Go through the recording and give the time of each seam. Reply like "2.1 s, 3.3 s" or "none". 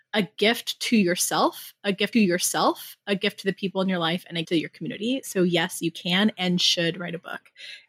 2.1 s, 4.4 s

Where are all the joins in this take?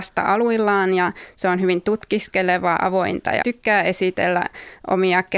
2.8 s, 3.4 s

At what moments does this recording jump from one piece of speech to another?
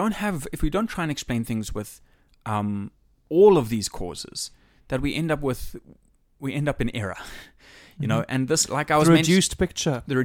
none

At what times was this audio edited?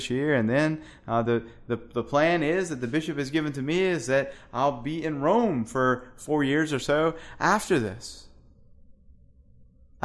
none

